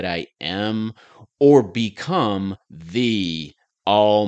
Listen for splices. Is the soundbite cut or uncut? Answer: uncut